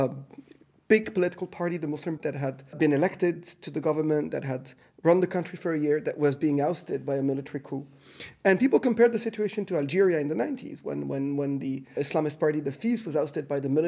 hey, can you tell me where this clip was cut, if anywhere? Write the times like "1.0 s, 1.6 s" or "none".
2.2 s, 2.7 s, 12.0 s